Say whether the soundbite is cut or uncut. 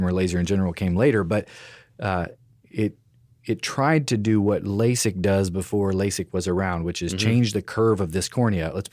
uncut